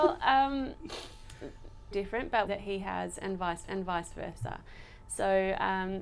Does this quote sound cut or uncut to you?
cut